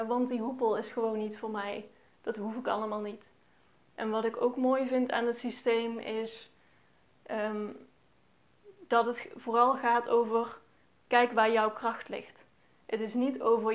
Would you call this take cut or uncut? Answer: uncut